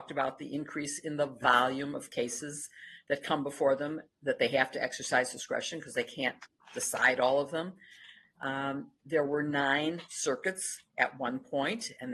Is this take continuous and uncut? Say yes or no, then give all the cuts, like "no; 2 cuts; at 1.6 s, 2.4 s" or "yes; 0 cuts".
no; 1 cut; at 9.0 s